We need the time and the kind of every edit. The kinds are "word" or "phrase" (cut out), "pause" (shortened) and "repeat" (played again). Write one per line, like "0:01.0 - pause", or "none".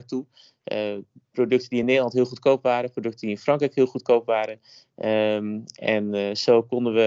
none